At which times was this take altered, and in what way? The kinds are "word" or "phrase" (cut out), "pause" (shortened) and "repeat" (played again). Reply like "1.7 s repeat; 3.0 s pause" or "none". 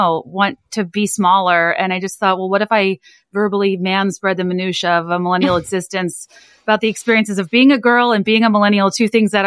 none